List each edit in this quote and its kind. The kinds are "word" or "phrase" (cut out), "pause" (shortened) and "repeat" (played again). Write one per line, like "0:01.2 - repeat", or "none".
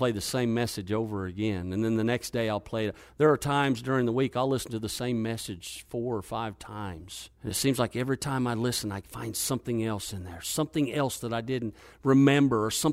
0:07.3 - pause